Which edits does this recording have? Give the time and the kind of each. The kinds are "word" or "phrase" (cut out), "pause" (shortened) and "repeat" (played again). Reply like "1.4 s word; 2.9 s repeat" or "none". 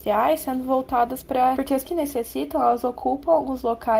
1.5 s phrase; 1.8 s word